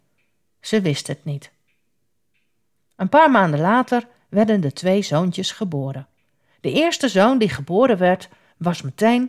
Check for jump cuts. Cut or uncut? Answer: uncut